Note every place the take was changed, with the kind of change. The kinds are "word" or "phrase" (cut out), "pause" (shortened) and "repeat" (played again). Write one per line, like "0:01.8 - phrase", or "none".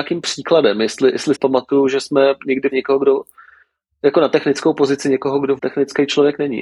0:01.3 - word
0:02.7 - word
0:05.6 - word

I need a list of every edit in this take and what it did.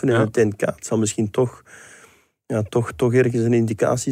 none

